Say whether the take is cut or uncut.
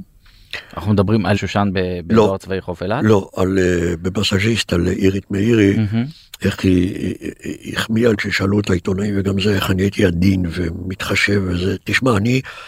cut